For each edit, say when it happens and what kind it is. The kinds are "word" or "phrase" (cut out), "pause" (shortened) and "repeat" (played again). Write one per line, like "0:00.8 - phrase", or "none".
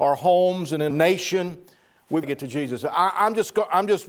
0:00.9 - word
0:02.2 - word